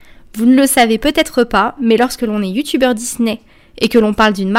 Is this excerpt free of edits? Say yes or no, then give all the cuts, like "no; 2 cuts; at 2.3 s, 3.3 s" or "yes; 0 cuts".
yes; 0 cuts